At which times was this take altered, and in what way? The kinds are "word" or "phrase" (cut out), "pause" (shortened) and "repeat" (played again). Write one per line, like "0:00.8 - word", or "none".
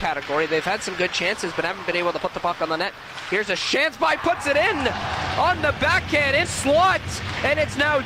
0:04.2 - phrase
0:06.4 - word